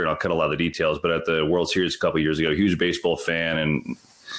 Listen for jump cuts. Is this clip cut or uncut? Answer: uncut